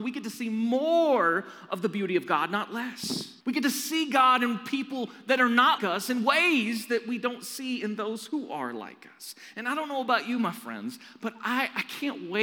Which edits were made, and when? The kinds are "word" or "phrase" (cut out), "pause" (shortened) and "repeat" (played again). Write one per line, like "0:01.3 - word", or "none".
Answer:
0:03.4 - pause
0:05.8 - word